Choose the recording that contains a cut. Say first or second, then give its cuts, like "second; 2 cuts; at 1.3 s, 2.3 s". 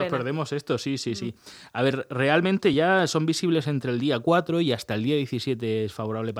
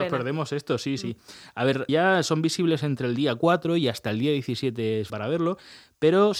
second; 3 cuts; at 1.0 s, 1.9 s, 5.1 s